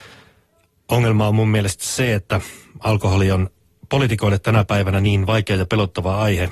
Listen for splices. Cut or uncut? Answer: uncut